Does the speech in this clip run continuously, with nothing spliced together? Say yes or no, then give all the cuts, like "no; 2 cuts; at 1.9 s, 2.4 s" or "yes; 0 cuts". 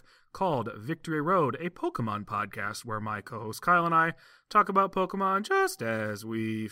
yes; 0 cuts